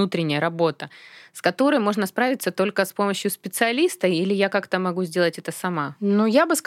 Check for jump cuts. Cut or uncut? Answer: uncut